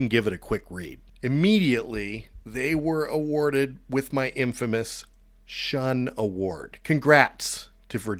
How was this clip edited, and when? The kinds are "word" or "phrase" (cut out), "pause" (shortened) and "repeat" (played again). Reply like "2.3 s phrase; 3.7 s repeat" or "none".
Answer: 1.1 s pause